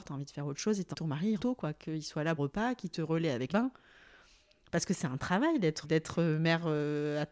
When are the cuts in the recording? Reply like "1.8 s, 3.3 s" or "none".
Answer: 0.9 s, 1.4 s, 2.4 s, 3.5 s, 5.8 s